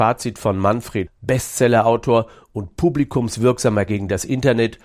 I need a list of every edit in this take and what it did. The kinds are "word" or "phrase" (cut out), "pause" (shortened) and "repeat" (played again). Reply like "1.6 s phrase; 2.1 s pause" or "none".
1.1 s word; 3.9 s word